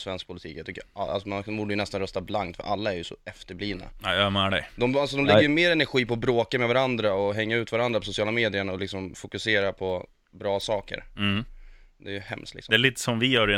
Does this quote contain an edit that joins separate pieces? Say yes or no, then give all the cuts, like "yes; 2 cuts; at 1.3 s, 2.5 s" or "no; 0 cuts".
no; 0 cuts